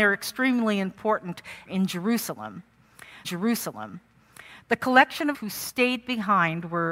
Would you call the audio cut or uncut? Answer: cut